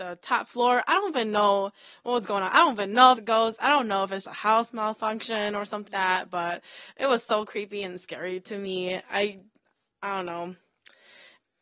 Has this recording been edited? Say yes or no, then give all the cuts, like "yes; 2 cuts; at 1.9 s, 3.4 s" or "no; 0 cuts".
yes; 3 cuts; at 3.2 s, 4.3 s, 5.9 s